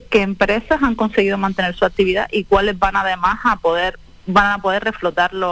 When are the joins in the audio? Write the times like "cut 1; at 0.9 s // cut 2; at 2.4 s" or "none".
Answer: none